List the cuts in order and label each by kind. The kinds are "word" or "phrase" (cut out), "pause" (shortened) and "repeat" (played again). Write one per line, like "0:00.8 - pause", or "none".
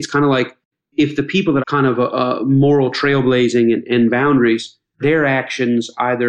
0:01.6 - phrase
0:03.8 - word